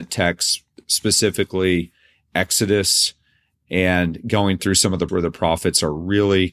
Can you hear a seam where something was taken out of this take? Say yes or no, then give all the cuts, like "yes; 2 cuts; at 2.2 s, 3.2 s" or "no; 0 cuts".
yes; 1 cut; at 5.1 s